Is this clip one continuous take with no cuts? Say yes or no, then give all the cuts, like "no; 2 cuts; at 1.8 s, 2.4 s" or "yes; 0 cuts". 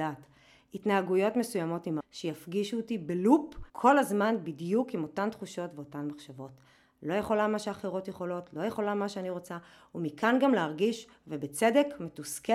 no; 2 cuts; at 2.0 s, 3.7 s